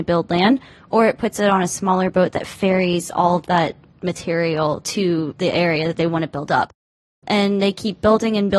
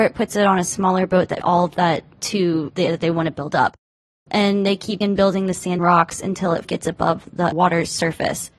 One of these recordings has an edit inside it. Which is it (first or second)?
second